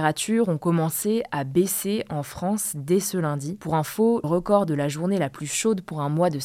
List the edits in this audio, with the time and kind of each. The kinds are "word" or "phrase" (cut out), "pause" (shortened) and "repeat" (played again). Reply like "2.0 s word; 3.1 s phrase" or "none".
4.2 s word